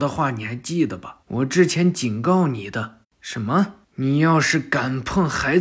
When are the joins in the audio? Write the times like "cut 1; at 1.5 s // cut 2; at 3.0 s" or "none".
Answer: cut 1; at 1.2 s // cut 2; at 3.8 s